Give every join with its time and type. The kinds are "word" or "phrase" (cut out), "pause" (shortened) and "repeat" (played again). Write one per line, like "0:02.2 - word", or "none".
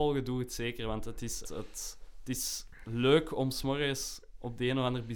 0:01.4 - word